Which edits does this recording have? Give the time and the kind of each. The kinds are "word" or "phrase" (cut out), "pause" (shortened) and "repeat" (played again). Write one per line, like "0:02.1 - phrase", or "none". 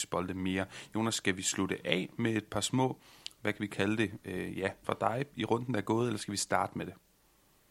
0:04.8 - word

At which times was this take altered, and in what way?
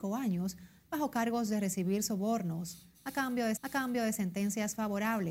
0:03.6 - repeat

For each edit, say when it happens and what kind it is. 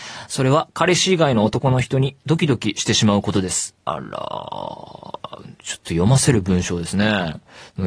0:03.8 - pause

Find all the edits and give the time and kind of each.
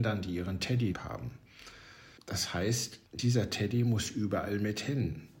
0:00.9 - word
0:02.2 - pause
0:03.1 - pause

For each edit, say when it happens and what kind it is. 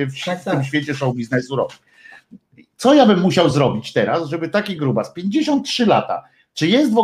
none

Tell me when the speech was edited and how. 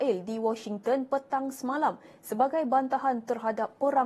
none

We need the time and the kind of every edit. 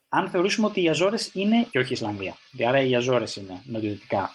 0:01.7 - phrase

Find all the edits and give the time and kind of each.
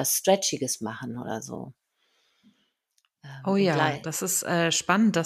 none

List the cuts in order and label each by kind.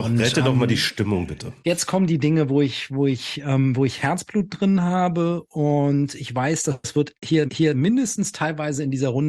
0:07.5 - repeat

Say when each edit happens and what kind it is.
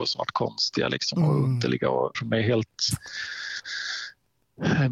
0:02.1 - word

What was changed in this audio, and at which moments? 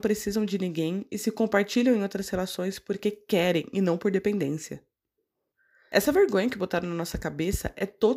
none

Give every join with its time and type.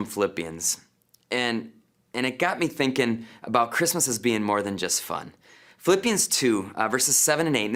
none

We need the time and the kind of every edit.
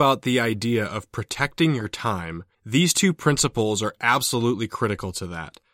0:02.5 - pause

